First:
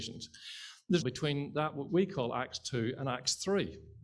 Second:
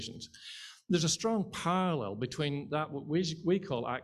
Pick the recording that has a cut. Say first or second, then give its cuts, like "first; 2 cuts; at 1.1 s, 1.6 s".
first; 2 cuts; at 1.0 s, 1.9 s